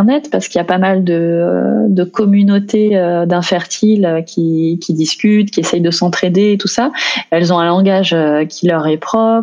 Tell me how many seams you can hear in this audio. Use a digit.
0